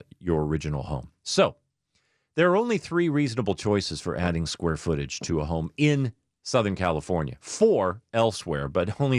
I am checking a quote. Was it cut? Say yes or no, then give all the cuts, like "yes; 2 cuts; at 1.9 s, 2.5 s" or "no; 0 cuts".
no; 0 cuts